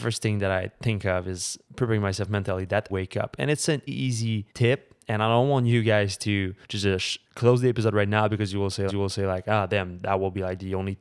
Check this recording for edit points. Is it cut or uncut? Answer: cut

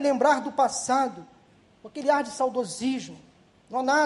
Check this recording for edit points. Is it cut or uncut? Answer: uncut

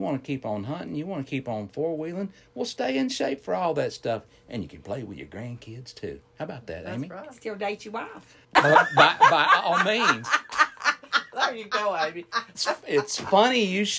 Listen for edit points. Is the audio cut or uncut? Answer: cut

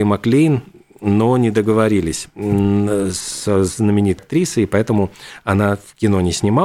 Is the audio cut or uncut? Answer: cut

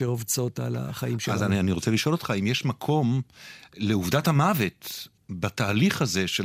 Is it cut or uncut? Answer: uncut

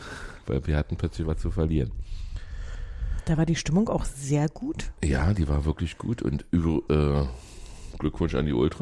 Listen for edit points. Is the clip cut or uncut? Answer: cut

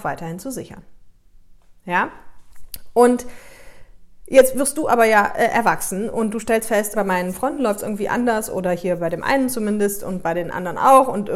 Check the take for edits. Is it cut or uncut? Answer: cut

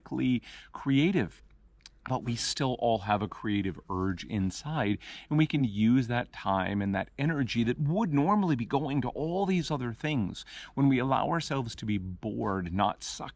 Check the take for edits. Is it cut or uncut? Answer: uncut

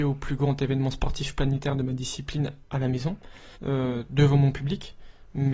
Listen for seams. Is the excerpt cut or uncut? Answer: cut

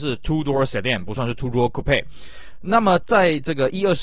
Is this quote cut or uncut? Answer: uncut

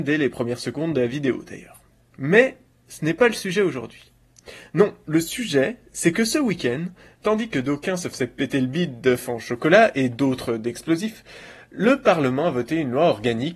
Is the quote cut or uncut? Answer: uncut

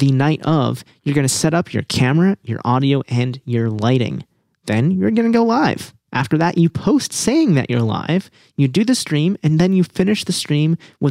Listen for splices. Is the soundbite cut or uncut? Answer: uncut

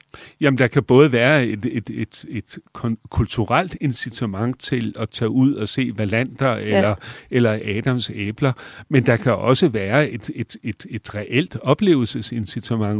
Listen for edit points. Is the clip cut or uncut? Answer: uncut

